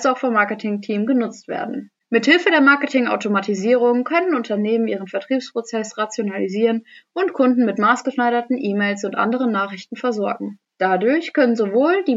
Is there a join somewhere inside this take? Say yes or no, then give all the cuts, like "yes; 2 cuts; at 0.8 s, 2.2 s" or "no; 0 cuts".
no; 0 cuts